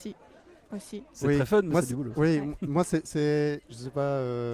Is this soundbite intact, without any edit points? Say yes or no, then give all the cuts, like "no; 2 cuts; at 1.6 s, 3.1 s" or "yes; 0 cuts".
yes; 0 cuts